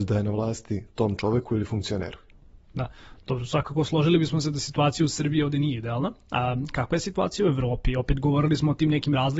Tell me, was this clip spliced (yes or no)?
no